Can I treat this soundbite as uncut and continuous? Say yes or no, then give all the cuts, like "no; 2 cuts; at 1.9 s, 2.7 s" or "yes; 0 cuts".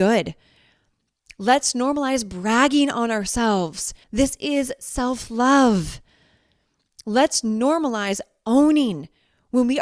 no; 1 cut; at 4.0 s